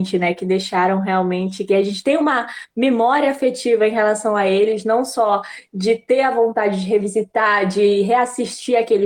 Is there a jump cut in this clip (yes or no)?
no